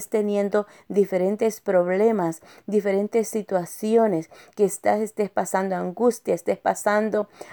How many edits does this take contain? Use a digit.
0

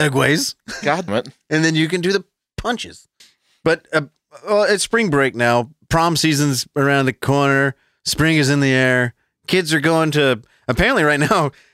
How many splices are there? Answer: 2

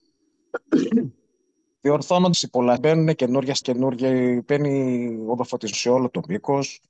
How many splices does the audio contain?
4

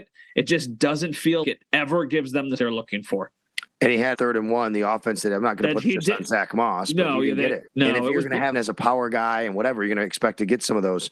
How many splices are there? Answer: 5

